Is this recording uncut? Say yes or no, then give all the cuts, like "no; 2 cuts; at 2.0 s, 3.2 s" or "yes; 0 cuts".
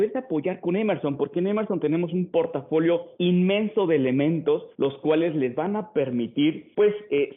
no; 2 cuts; at 3.1 s, 4.7 s